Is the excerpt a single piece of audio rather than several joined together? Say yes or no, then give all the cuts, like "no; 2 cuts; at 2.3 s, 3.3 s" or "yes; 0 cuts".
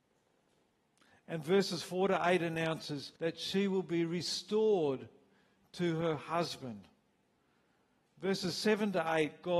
no; 1 cut; at 3.2 s